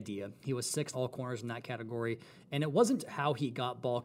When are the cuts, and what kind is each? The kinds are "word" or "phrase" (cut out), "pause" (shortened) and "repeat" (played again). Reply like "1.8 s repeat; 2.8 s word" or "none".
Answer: 0.9 s word; 3.0 s word

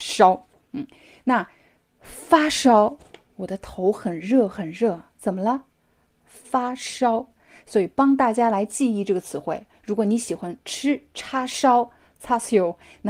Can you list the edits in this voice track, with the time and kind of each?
none

